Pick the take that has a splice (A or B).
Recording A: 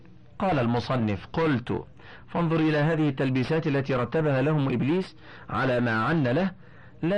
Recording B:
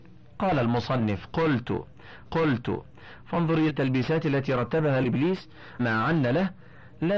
B